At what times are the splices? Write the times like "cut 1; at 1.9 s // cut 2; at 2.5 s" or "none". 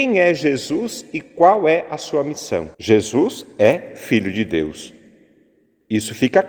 cut 1; at 2.7 s

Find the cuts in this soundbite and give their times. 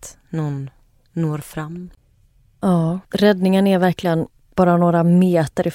cut 1; at 3.0 s // cut 2; at 4.4 s

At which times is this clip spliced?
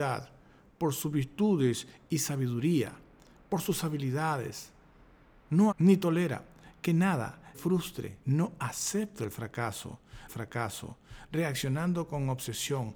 cut 1; at 5.7 s // cut 2; at 7.5 s // cut 3; at 8.2 s // cut 4; at 10.3 s

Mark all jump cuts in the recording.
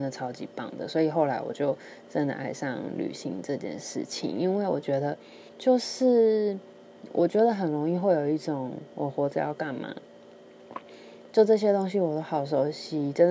cut 1; at 5.5 s

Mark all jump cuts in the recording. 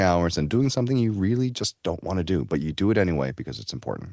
none

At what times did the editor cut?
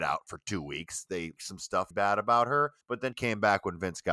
cut 1; at 1.4 s // cut 2; at 1.9 s // cut 3; at 2.8 s // cut 4; at 3.1 s

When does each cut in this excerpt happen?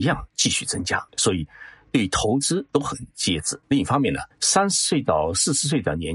cut 1; at 1.1 s // cut 2; at 2.7 s // cut 3; at 3.6 s // cut 4; at 4.3 s

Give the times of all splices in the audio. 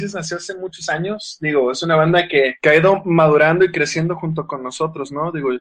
none

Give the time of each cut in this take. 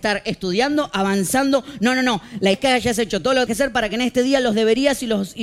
cut 1; at 2.5 s // cut 2; at 3.5 s

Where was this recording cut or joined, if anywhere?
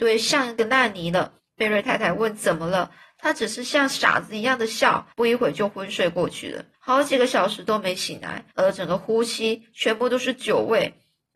cut 1; at 1.4 s // cut 2; at 5.1 s // cut 3; at 6.7 s // cut 4; at 8.5 s

